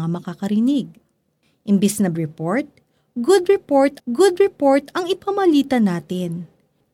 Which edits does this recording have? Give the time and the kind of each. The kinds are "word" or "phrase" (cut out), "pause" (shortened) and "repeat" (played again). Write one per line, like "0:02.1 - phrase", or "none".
0:02.1 - word
0:04.0 - repeat